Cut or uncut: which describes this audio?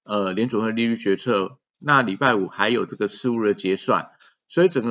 cut